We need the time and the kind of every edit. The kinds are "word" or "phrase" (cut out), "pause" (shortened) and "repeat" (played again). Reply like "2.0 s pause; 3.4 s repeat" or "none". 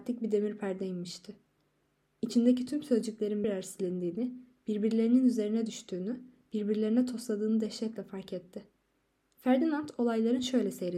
2.7 s phrase; 3.4 s word